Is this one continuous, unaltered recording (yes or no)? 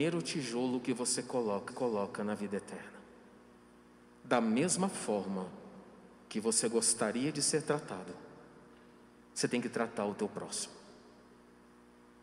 no